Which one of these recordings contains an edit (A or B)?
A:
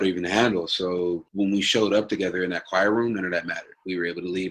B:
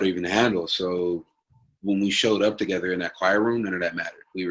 A